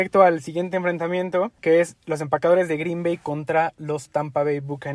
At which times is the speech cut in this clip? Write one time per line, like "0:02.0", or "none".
0:01.6